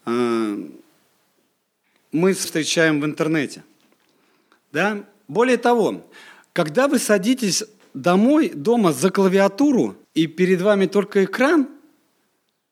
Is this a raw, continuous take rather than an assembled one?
no; 2 cuts; at 2.4 s, 10.0 s

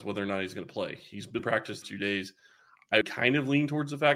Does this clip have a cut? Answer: yes; 3 cuts; at 1.4 s, 1.8 s, 3.0 s

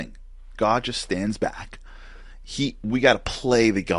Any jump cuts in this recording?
no; 0 cuts

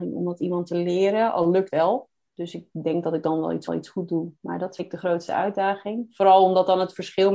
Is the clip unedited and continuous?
no; 4 cuts; at 1.7 s, 3.7 s, 4.4 s, 4.8 s

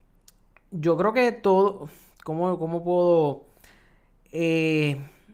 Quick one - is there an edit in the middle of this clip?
no; 0 cuts

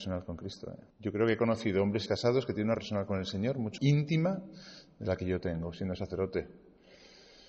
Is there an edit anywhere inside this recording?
yes; 4 cuts; at 0.9 s, 2.1 s, 2.7 s, 3.8 s

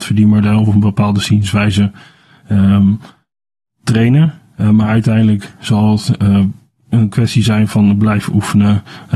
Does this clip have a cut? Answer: no; 0 cuts

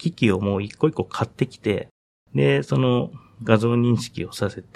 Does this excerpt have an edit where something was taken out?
no; 0 cuts

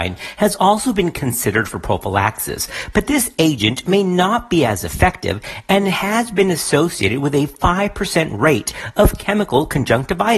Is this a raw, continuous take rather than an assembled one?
yes; 0 cuts

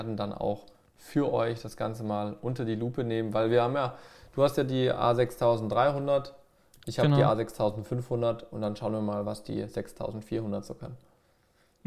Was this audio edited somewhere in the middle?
no; 0 cuts

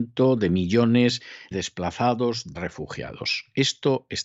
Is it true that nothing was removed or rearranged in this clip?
no; 2 cuts; at 1.5 s, 2.5 s

